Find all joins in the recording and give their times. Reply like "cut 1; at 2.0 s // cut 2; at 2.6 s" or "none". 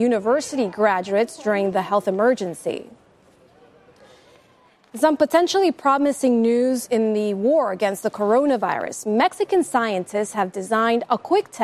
none